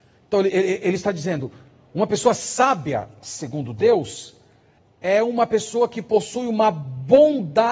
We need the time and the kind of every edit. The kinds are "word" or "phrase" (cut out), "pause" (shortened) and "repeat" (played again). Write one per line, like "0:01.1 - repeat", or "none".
none